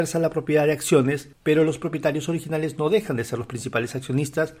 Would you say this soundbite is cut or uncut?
cut